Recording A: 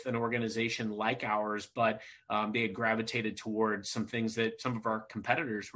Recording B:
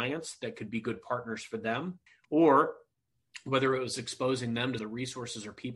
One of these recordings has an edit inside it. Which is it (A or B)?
B